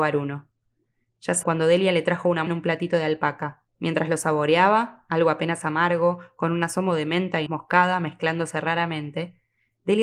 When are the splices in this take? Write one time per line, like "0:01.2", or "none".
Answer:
0:01.4
0:02.5
0:03.7
0:07.5